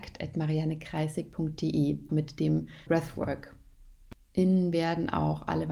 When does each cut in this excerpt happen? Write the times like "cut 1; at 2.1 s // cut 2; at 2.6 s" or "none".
cut 1; at 2.1 s // cut 2; at 2.9 s // cut 3; at 4.7 s

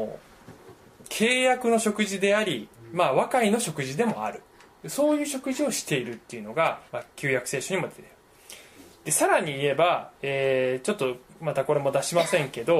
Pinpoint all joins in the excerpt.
cut 1; at 6.9 s // cut 2; at 10.1 s

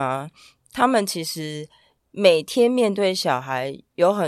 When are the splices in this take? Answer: none

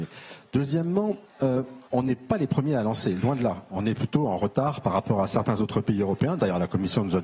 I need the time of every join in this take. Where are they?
cut 1; at 1.9 s

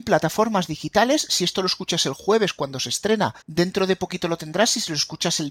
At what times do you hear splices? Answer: cut 1; at 3.4 s

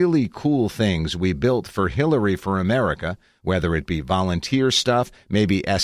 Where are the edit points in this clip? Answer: none

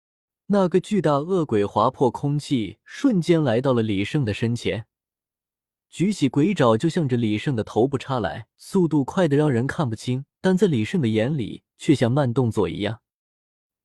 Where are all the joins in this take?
cut 1; at 8.5 s // cut 2; at 10.3 s // cut 3; at 11.7 s

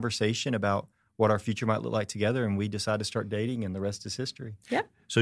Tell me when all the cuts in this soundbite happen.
none

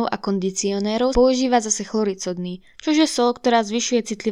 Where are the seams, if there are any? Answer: cut 1; at 1.1 s

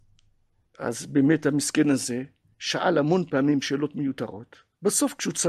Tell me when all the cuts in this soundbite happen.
none

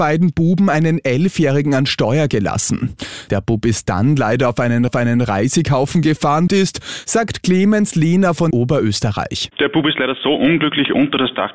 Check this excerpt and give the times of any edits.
cut 1; at 4.9 s // cut 2; at 6.5 s // cut 3; at 8.5 s

